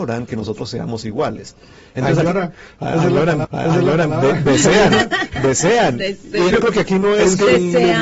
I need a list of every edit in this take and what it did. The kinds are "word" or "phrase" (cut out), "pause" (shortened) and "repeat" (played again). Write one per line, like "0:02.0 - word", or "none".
0:03.4 - repeat
0:06.5 - word